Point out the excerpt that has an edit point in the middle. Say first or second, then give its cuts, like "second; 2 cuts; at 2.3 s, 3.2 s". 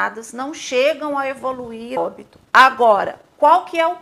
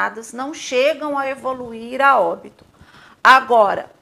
first; 2 cuts; at 2.0 s, 2.5 s